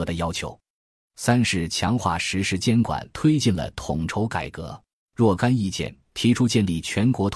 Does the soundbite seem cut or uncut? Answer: cut